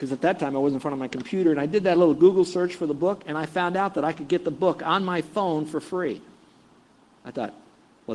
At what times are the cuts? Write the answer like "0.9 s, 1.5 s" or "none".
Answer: none